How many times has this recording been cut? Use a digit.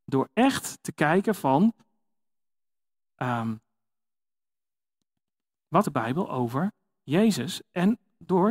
1